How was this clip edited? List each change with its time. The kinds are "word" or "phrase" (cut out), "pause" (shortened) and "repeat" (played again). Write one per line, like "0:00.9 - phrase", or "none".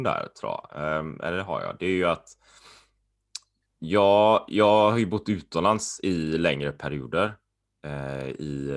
none